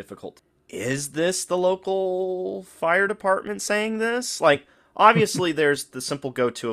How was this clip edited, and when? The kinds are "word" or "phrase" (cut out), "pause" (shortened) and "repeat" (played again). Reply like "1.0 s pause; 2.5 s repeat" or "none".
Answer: none

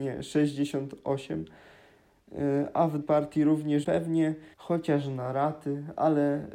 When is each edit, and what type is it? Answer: 3.0 s word; 3.8 s word; 4.5 s pause

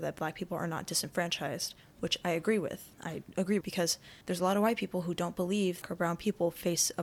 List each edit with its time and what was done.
2.9 s pause; 3.6 s word; 4.2 s pause; 5.8 s phrase

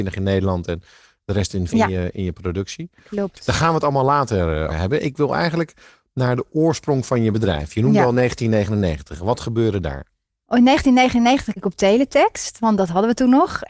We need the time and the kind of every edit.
1.7 s word; 4.7 s word; 11.6 s word

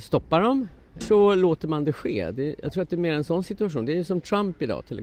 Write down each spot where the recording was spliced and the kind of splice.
1.0 s word

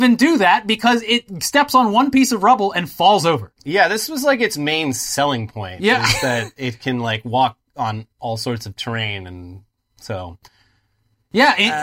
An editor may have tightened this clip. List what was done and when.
none

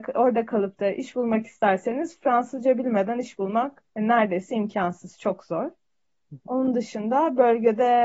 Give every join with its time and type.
3.9 s pause

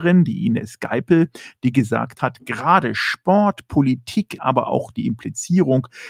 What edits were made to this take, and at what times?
4.4 s word

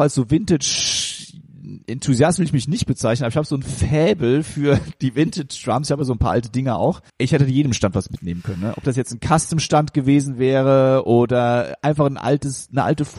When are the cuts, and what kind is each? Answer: 7.1 s pause

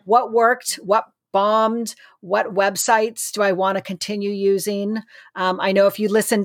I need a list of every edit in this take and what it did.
none

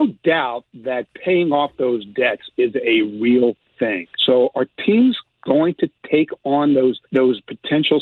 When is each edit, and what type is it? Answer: 4.1 s pause; 7.0 s pause

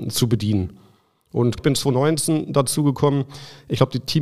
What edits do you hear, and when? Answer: 1.6 s word

